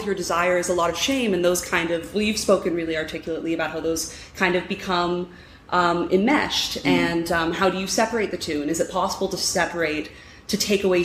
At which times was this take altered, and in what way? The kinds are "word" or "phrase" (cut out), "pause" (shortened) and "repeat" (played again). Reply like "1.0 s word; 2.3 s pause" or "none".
none